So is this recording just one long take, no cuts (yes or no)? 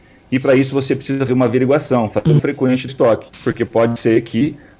no